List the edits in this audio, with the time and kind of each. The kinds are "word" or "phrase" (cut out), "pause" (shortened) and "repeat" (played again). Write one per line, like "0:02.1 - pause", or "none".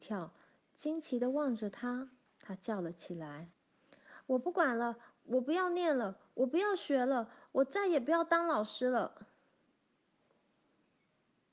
0:02.3 - pause
0:03.5 - pause